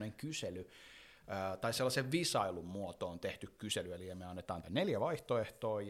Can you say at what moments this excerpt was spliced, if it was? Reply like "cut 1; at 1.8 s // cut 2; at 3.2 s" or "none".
cut 1; at 4.6 s